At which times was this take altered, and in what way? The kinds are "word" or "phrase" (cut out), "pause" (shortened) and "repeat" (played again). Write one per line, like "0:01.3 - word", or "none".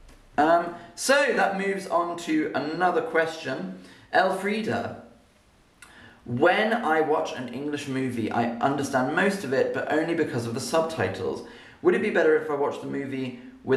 none